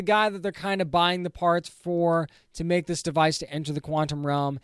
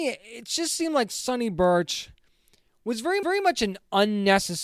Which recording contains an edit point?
second; 1 cut; at 3.2 s

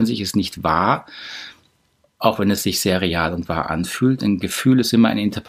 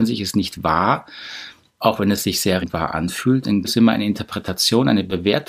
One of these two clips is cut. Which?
second; 3 cuts; at 1.7 s, 2.6 s, 3.6 s

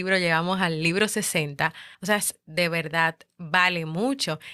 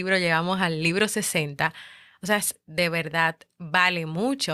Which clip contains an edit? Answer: first; 1 cut; at 1.9 s

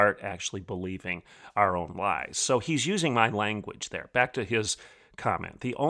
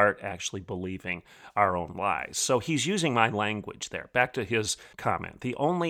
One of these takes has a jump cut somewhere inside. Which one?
second; 1 cut; at 4.9 s

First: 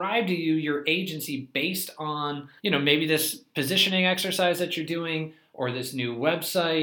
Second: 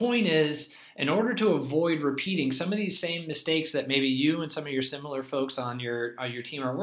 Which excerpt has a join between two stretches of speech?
first; 1 cut; at 2.6 s

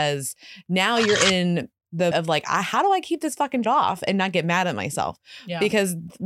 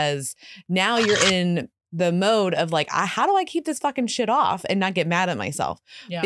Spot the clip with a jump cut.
first; 2 cuts; at 2.1 s, 3.6 s

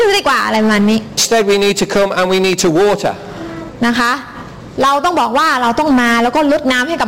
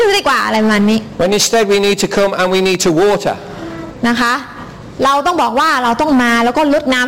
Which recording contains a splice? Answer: first; 1 cut; at 1.2 s

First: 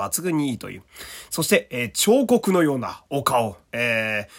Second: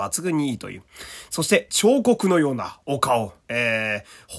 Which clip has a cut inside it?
second; 1 cut; at 1.7 s

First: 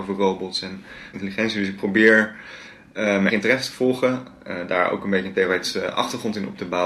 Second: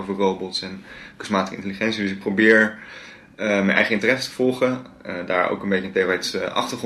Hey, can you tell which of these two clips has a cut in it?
first; 2 cuts; at 1.1 s, 3.3 s

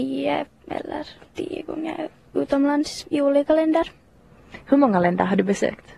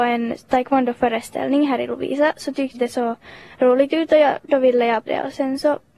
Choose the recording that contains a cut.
second; 2 cuts; at 2.7 s, 5.1 s

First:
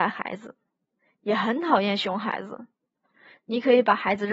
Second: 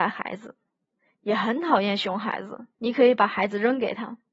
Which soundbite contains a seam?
second; 1 cut; at 2.7 s

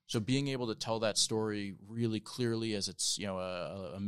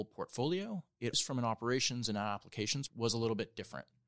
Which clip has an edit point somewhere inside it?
second; 2 cuts; at 1.1 s, 2.9 s

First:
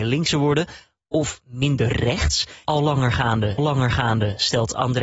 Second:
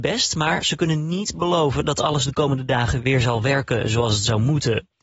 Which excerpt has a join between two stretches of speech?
first; 2 cuts; at 2.6 s, 3.6 s

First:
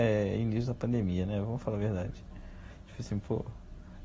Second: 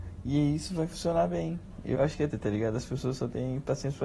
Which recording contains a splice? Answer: second; 2 cuts; at 2.0 s, 2.3 s

